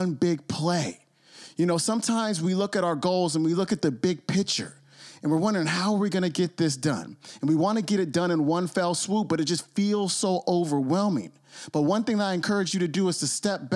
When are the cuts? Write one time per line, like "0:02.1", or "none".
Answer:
none